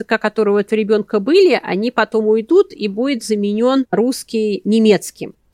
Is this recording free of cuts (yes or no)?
yes